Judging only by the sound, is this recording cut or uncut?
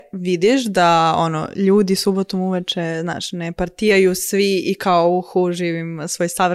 uncut